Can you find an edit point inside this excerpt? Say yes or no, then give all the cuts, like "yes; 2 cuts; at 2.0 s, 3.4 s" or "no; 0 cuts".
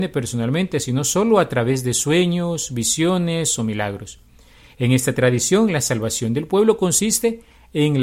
no; 0 cuts